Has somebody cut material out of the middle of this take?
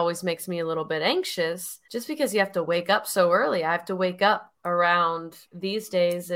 yes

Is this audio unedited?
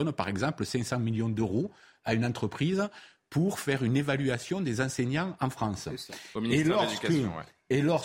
yes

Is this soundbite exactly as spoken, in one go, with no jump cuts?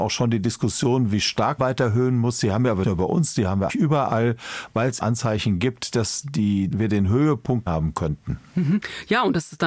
no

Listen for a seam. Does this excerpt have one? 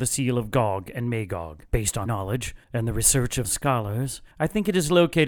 yes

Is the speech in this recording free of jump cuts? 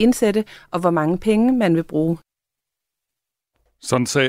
yes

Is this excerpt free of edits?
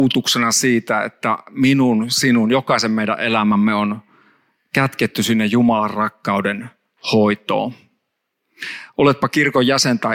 yes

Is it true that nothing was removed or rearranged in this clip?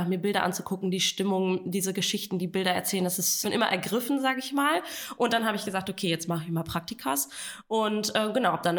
no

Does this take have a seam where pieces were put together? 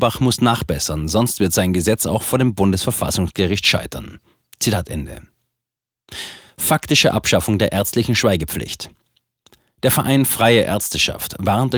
no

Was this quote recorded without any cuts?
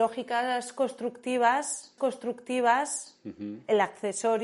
no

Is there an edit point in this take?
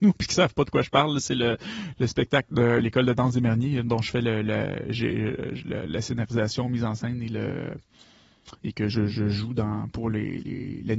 yes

